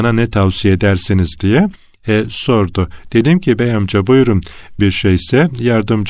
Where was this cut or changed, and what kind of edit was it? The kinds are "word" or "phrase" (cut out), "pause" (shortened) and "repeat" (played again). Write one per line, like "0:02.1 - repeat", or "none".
0:04.8 - word